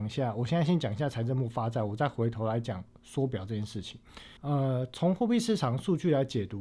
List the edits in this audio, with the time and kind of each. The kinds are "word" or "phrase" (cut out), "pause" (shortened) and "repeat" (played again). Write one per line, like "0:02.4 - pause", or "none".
0:04.4 - pause